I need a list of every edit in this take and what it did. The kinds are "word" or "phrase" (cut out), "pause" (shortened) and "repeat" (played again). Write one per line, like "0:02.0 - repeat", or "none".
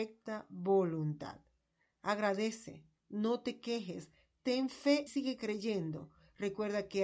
0:05.1 - word